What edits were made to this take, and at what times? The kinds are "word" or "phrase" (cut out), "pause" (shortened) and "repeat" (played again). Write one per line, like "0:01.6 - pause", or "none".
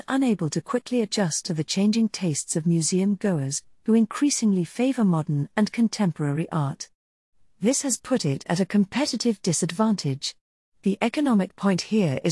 none